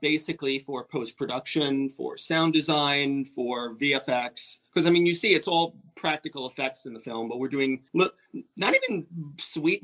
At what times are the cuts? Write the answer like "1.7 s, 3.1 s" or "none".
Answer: 4.7 s, 7.9 s